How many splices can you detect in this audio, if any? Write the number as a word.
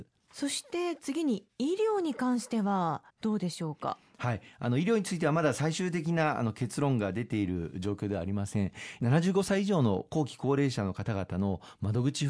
one